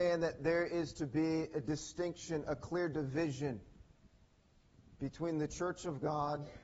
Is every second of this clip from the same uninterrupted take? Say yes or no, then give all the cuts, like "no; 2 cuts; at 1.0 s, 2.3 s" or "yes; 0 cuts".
yes; 0 cuts